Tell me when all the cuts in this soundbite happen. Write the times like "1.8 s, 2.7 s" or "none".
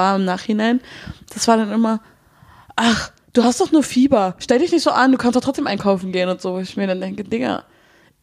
none